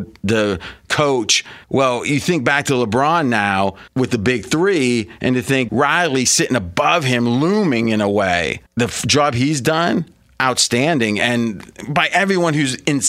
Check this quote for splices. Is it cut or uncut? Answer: cut